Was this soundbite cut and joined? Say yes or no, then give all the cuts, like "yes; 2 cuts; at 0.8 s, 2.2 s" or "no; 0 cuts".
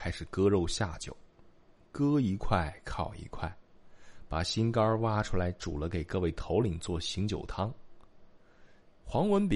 no; 0 cuts